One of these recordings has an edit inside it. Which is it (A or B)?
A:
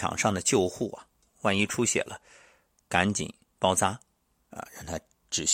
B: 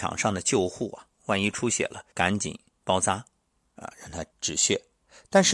B